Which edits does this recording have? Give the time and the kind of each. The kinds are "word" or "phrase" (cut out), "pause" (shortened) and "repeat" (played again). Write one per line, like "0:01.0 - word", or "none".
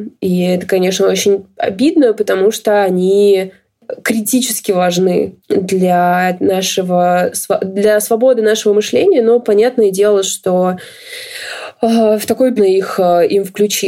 0:05.4 - pause
0:12.6 - phrase